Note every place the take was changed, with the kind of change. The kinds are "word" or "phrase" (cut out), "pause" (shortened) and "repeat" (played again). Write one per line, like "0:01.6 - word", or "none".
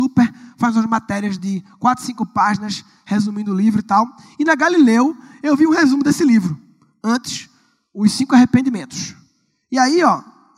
none